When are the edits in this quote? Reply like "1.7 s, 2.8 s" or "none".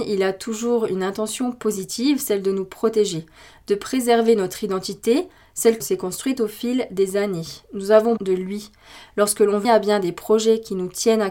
5.8 s, 8.2 s, 9.6 s